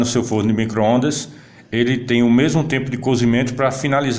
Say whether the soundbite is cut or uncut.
uncut